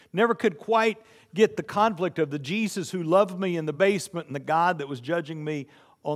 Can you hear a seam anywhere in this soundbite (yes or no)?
no